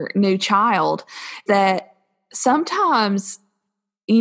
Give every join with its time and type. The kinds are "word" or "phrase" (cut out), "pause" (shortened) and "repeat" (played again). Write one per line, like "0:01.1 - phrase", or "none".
0:01.5 - word